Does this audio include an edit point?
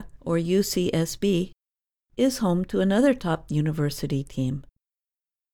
no; 0 cuts

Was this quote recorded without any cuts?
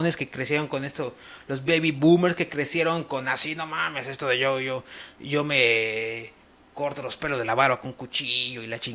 yes; 0 cuts

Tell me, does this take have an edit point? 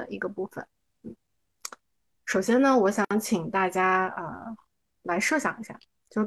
no; 0 cuts

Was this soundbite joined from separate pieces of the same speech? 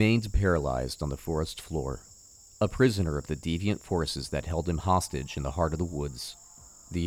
no; 0 cuts

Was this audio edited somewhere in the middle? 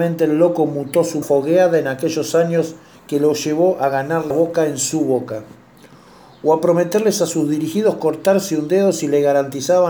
yes; 3 cuts; at 1.2 s, 3.0 s, 4.3 s

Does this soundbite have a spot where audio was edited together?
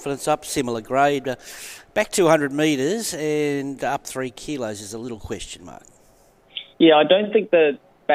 yes; 1 cut; at 6.7 s

